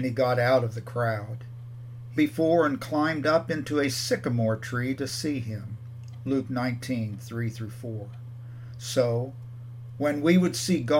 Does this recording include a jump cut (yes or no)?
yes